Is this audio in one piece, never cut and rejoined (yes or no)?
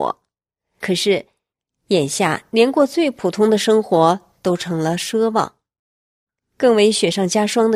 yes